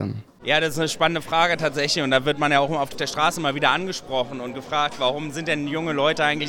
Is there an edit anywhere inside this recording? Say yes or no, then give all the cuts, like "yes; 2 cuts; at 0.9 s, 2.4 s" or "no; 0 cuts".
no; 0 cuts